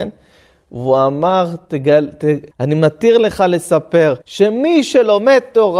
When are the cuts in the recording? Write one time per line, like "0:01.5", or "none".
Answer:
0:02.5
0:04.2